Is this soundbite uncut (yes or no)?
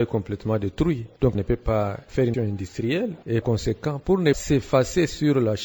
no